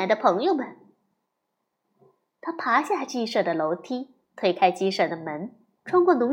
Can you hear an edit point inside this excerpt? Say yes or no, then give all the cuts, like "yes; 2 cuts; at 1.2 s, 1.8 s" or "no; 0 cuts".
no; 0 cuts